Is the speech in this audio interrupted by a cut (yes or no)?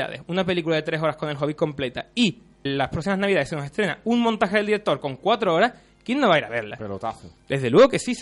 yes